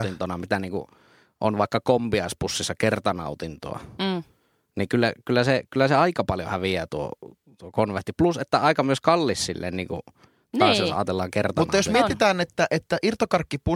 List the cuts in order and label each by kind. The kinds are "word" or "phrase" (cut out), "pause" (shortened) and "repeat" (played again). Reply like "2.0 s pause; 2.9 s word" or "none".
none